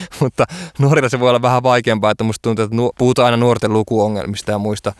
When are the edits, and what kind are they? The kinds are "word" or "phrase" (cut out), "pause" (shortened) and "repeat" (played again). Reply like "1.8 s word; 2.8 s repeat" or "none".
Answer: 2.9 s word